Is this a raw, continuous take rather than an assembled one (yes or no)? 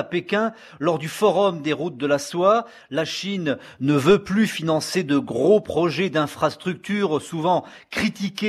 yes